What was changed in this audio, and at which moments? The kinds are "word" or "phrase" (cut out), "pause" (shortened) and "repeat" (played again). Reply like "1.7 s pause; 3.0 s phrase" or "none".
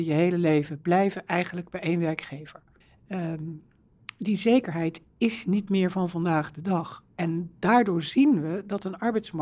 none